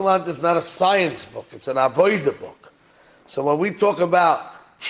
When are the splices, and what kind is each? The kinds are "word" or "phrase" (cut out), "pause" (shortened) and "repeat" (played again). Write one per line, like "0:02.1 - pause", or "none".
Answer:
none